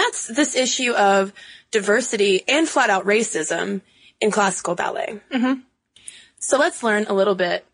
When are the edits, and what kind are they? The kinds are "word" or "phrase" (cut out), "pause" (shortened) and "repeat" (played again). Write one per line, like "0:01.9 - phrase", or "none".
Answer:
none